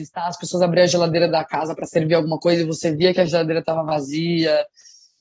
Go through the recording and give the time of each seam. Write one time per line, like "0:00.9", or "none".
none